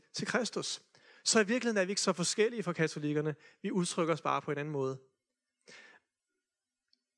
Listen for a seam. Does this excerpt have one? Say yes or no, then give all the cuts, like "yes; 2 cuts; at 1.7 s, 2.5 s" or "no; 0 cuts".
no; 0 cuts